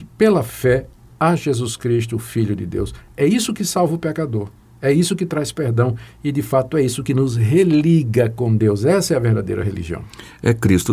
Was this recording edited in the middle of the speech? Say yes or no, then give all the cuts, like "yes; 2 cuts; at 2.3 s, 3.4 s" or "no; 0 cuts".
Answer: no; 0 cuts